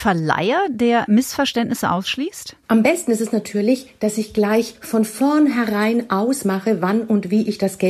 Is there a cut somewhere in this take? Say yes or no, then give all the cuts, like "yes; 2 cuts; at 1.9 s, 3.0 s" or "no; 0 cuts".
yes; 1 cut; at 2.6 s